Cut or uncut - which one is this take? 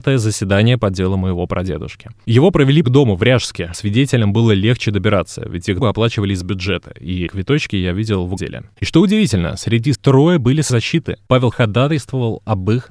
cut